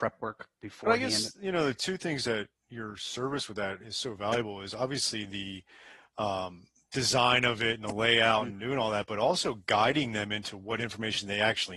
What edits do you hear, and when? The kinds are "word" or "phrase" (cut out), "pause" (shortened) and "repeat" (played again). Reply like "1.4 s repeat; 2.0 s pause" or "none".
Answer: none